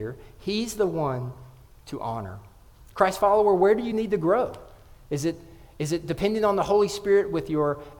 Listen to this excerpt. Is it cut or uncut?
uncut